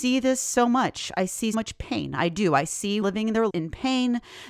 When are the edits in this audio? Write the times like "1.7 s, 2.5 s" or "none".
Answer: 1.5 s, 3.0 s, 3.5 s